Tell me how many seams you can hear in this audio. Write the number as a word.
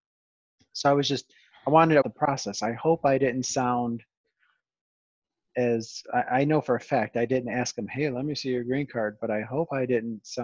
one